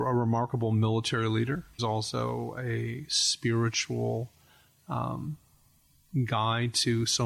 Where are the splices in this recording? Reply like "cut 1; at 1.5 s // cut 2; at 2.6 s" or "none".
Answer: cut 1; at 1.8 s